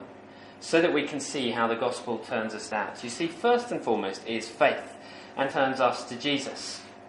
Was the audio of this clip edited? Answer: yes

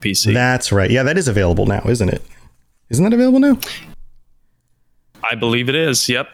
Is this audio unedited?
yes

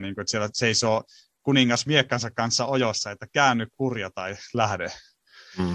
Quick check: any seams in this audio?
no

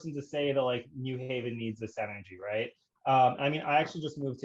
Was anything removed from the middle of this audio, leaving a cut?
no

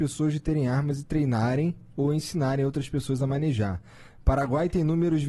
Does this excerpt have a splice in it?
no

